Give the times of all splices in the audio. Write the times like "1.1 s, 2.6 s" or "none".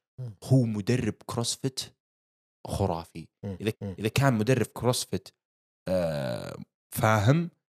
3.7 s